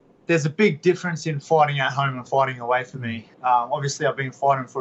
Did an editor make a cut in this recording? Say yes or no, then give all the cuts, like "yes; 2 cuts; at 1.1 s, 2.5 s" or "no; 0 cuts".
yes; 1 cut; at 3.3 s